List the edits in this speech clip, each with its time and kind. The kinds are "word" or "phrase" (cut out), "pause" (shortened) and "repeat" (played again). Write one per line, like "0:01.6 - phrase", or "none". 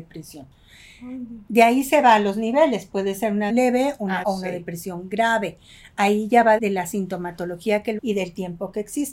0:03.5 - word
0:04.2 - phrase
0:06.6 - word
0:08.0 - word